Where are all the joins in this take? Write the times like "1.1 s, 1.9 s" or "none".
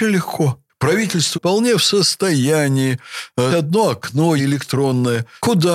1.3 s, 3.5 s, 4.4 s